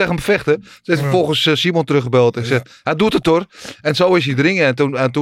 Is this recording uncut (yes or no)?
yes